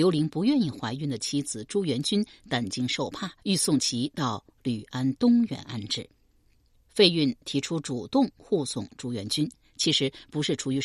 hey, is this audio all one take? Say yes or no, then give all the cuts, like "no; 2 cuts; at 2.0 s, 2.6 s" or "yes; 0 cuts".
no; 1 cut; at 3.4 s